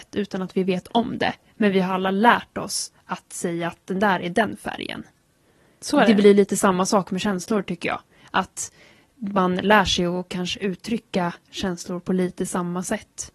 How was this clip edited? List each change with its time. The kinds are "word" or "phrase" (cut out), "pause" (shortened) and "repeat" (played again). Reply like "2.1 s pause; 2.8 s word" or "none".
none